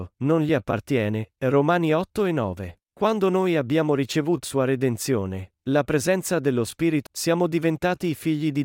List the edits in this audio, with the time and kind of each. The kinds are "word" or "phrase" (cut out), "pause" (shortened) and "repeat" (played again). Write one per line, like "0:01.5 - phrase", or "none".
0:02.9 - pause
0:04.4 - word
0:05.6 - word
0:07.1 - word

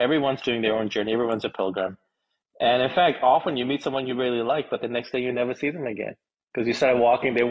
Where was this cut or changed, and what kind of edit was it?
none

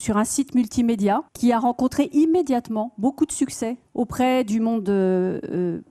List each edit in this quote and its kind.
0:01.3 - pause
0:03.9 - pause

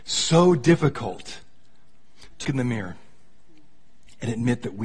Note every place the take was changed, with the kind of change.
0:02.4 - word

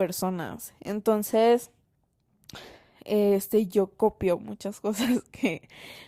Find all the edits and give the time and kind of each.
none

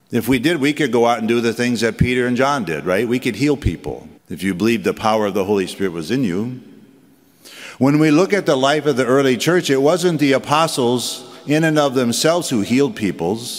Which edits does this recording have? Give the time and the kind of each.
0:04.2 - pause

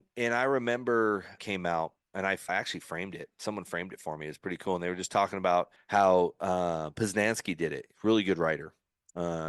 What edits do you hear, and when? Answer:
0:01.4 - phrase
0:02.0 - pause
0:02.5 - word
0:05.8 - pause

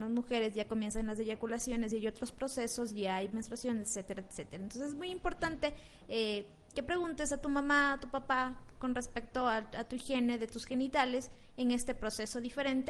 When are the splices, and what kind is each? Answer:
none

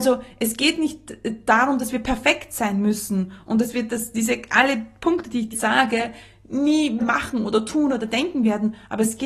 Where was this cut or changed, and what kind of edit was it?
0:05.5 - word
0:07.0 - word

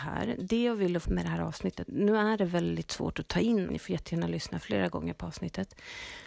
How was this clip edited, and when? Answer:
0:01.0 - word
0:01.9 - word
0:03.7 - word

